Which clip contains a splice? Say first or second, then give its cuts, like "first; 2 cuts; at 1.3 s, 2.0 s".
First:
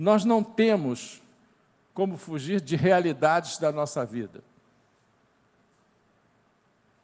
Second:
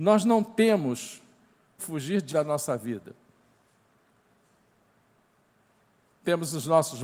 second; 2 cuts; at 1.8 s, 2.3 s